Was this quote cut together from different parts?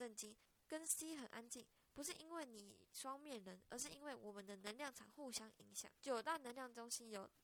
yes; 1 cut; at 6.0 s

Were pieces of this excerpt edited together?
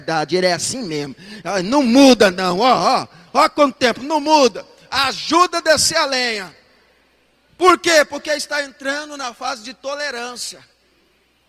no; 0 cuts

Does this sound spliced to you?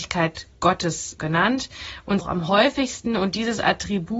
yes; 2 cuts; at 1.2 s, 2.2 s

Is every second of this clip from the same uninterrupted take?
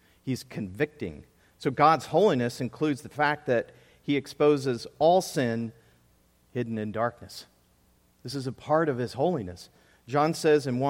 yes; 0 cuts

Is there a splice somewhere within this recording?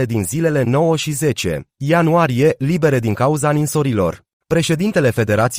yes; 1 cut; at 1.7 s

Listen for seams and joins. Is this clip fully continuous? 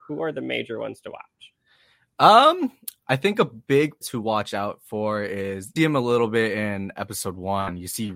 no; 2 cuts; at 4.0 s, 5.8 s

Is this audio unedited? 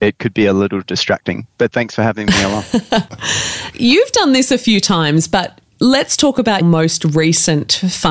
no; 2 cuts; at 3.7 s, 6.6 s

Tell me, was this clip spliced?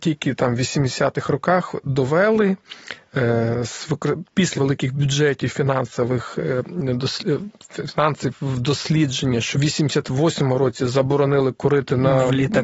yes; 2 cuts; at 4.5 s, 9.5 s

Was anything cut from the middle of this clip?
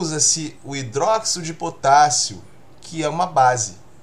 no; 0 cuts

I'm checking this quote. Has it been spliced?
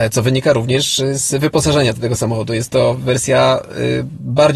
yes; 1 cut; at 1.9 s

